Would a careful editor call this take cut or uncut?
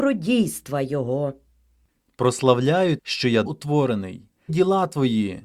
cut